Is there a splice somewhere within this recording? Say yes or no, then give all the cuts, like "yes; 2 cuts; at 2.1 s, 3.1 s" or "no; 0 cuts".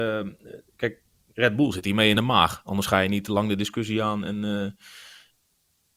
no; 0 cuts